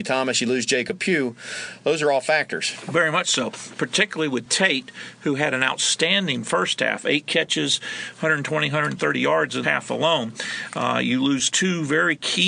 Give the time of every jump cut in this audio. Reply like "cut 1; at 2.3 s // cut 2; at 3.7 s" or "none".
cut 1; at 9.6 s

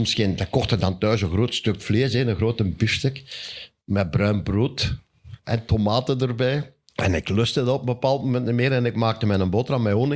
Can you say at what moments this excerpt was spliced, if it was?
cut 1; at 5.4 s // cut 2; at 6.8 s

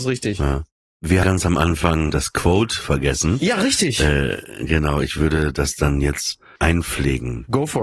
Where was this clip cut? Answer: cut 1; at 1.2 s // cut 2; at 2.1 s // cut 3; at 6.6 s

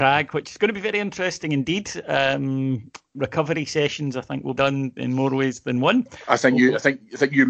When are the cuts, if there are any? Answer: cut 1; at 4.6 s

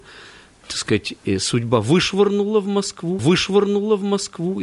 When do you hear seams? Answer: cut 1; at 3.2 s

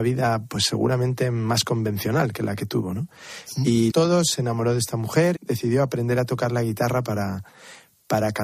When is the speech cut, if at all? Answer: cut 1; at 3.9 s // cut 2; at 5.4 s

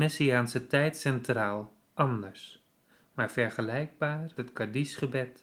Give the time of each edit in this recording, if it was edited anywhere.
cut 1; at 1.8 s // cut 2; at 4.4 s

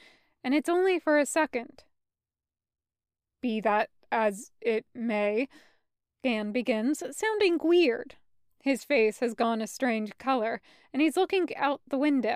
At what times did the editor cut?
none

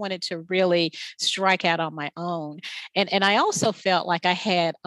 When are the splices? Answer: none

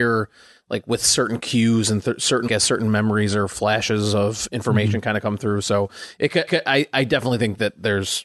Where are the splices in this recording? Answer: cut 1; at 2.5 s // cut 2; at 6.5 s

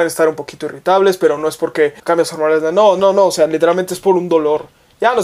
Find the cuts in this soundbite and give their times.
cut 1; at 2.0 s

